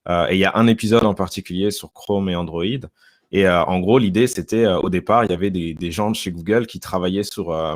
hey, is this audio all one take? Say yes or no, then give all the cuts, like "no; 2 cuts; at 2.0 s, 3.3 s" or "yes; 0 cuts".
yes; 0 cuts